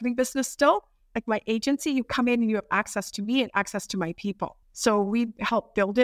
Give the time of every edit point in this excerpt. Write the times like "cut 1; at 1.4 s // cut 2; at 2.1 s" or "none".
cut 1; at 4.6 s